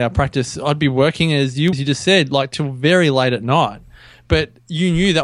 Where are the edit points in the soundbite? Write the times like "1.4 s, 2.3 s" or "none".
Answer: 1.7 s